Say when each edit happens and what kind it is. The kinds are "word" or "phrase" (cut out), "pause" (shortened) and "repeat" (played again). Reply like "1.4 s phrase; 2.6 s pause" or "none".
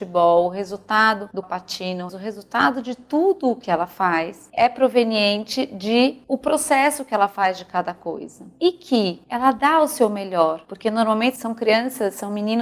1.4 s phrase; 2.1 s phrase

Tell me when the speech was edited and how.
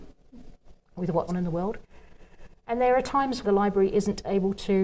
1.3 s word; 3.4 s word

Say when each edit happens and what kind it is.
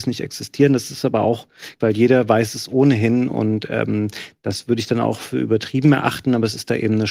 1.8 s word

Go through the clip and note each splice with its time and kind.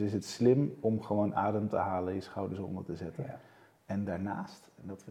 none

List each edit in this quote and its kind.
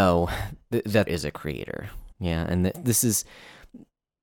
1.1 s word; 2.1 s pause; 2.7 s word

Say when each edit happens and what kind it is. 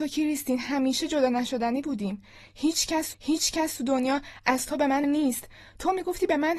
3.1 s repeat; 5.0 s word

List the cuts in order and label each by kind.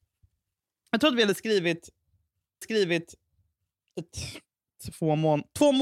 2.6 s repeat

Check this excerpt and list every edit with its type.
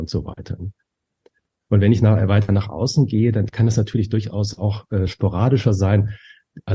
none

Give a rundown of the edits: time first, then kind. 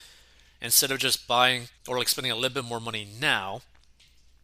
1.8 s pause

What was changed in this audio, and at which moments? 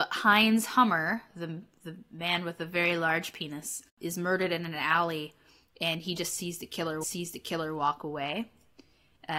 1.3 s word; 3.9 s pause; 7.0 s repeat

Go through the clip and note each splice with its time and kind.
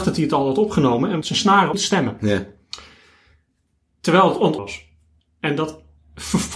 1.2 s word; 1.7 s word; 4.6 s word

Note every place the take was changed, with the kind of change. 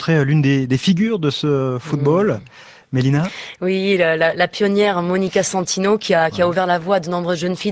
none

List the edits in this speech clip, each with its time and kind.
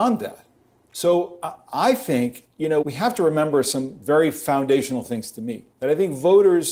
2.8 s word; 5.7 s pause

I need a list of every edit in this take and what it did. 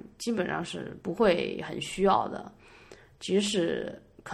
1.0 s pause

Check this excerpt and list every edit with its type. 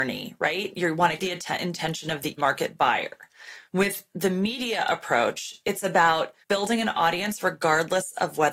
1.2 s word; 2.4 s word; 3.7 s pause; 6.4 s pause

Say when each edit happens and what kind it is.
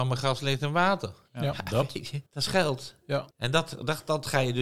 2.3 s pause; 3.3 s pause

